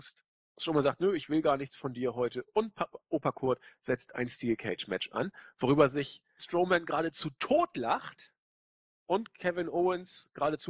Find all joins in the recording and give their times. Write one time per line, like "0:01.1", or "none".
0:06.4